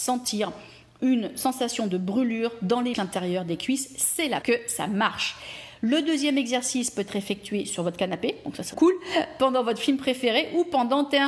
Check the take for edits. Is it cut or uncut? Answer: cut